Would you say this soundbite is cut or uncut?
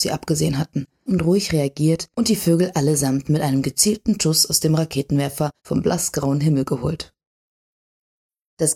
cut